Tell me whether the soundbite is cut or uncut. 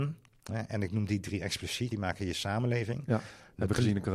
cut